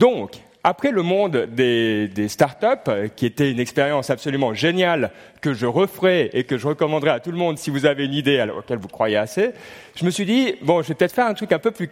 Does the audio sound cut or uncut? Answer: uncut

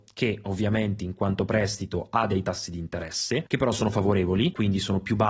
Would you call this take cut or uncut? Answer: uncut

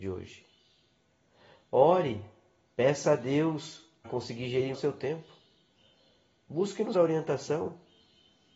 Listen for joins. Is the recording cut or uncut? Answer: cut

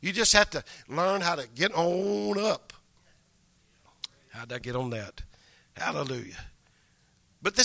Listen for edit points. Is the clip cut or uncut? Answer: uncut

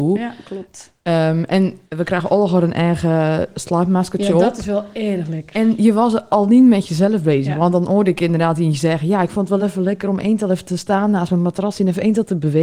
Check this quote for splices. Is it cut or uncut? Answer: uncut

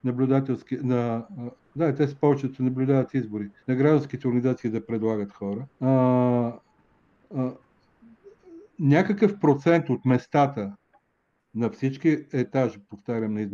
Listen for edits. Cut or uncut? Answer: cut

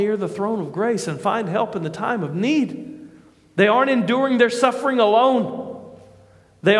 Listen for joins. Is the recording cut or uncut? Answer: uncut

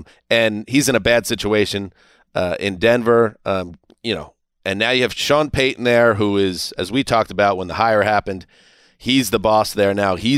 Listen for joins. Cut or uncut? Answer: uncut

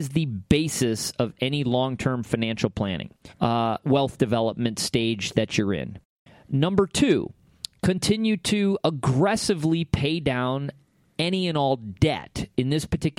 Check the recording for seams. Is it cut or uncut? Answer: uncut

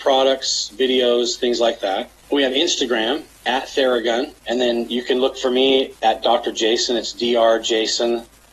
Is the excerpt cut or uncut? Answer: cut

